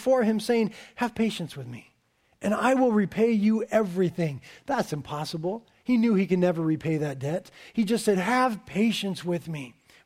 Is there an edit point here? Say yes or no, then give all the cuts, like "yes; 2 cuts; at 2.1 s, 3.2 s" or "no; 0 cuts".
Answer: no; 0 cuts